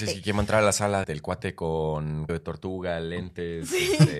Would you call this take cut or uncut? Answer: cut